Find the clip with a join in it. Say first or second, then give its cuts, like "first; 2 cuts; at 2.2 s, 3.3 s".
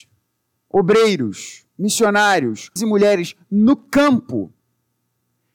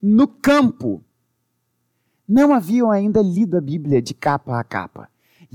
first; 1 cut; at 2.8 s